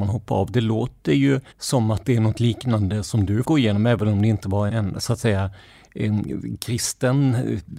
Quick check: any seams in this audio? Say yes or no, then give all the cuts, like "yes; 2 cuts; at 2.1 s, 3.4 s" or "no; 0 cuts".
yes; 3 cuts; at 1.5 s, 3.4 s, 4.7 s